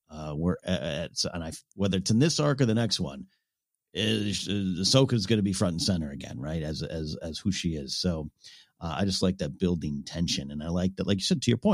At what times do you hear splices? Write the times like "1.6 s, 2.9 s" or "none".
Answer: 1.7 s